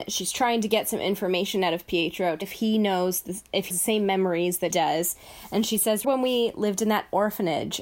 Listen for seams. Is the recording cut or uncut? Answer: cut